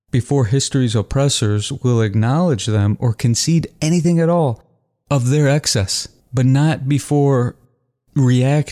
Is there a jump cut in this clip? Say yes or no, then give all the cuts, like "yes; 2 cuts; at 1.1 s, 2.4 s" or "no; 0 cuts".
yes; 1 cut; at 6.2 s